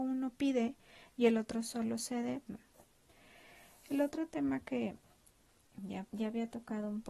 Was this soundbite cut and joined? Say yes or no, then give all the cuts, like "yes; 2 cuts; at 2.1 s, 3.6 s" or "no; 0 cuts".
yes; 2 cuts; at 2.5 s, 6.1 s